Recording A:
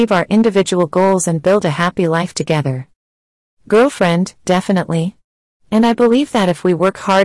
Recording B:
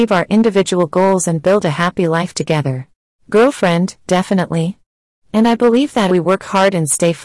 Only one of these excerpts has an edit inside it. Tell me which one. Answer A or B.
B